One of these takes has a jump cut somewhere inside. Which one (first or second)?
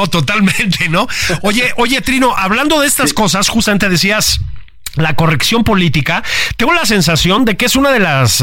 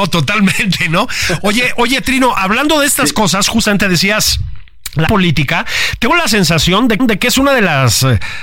second